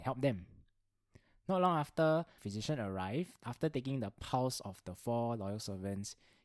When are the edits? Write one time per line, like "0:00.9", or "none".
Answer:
0:02.4
0:03.4